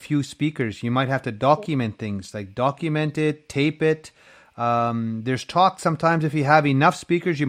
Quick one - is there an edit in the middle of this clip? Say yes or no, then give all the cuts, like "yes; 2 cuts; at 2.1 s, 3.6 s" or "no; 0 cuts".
no; 0 cuts